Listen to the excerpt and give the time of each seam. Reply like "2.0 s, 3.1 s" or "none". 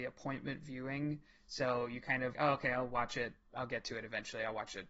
2.3 s